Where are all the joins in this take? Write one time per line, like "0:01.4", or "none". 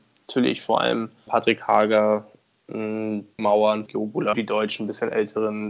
0:01.3
0:03.4
0:03.9
0:04.3